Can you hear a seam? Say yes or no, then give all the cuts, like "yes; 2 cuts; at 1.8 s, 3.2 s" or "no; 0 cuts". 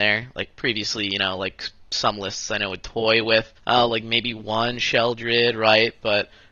yes; 1 cut; at 3.6 s